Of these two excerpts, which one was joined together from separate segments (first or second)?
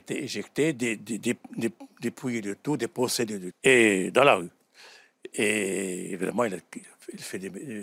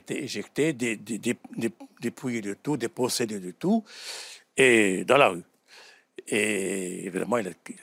first